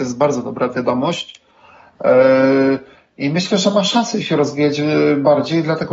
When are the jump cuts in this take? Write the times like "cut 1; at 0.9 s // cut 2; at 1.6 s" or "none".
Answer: none